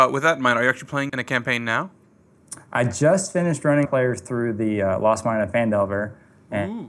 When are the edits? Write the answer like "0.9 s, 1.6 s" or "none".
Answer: 1.1 s, 3.8 s